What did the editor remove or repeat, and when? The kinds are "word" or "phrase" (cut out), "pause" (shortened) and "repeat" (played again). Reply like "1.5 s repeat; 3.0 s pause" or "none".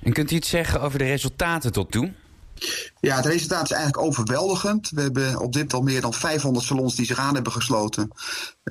1.9 s word; 5.7 s word